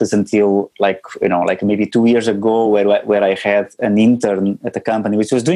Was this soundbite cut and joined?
no; 0 cuts

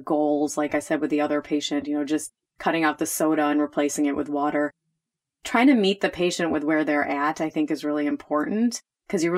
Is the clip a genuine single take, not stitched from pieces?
yes; 0 cuts

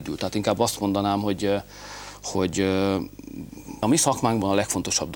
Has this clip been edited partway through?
yes; 1 cut; at 3.8 s

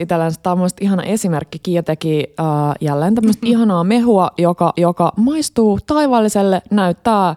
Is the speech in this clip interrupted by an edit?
yes; 1 cut; at 4.7 s

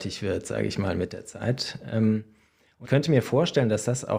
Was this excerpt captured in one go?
no; 1 cut; at 2.8 s

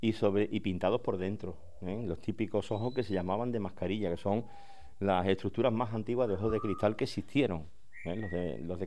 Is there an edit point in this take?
no; 0 cuts

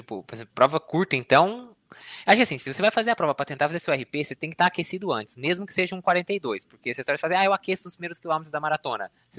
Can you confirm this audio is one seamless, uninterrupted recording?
yes; 0 cuts

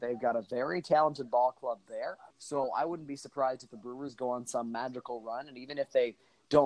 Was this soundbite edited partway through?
yes; 1 cut; at 2.3 s

